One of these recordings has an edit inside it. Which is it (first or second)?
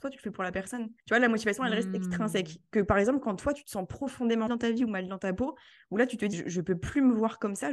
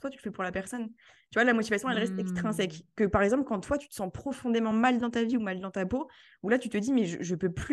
first